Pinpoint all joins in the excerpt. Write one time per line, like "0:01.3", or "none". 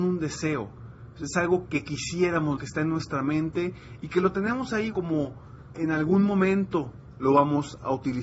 0:01.6
0:02.6
0:04.9
0:05.7